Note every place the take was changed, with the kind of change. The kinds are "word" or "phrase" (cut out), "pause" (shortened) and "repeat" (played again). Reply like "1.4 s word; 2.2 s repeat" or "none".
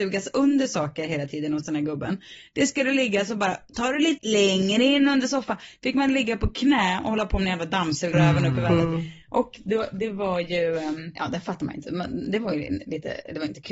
4.2 s word; 8.1 s word; 11.2 s word